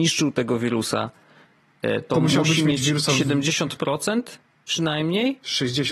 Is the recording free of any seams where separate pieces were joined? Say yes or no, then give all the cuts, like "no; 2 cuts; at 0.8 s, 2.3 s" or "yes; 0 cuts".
yes; 0 cuts